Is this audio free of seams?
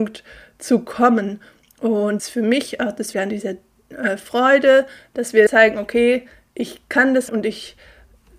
no; 4 cuts; at 2.2 s, 3.1 s, 5.5 s, 7.3 s

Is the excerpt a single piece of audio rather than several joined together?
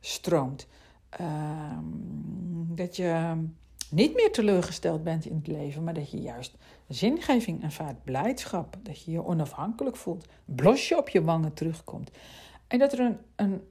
yes; 0 cuts

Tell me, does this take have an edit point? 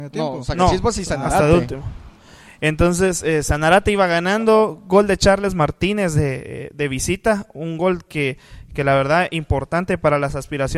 no; 0 cuts

